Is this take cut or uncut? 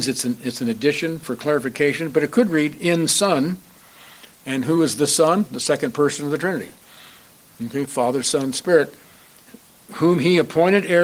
uncut